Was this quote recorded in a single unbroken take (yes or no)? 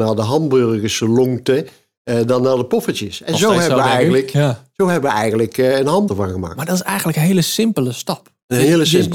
no